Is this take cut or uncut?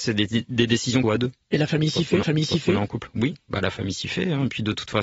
cut